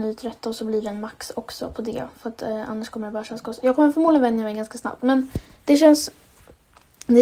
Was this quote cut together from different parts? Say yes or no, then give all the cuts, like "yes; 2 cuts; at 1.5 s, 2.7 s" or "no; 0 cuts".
no; 0 cuts